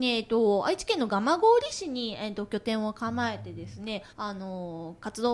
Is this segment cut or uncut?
cut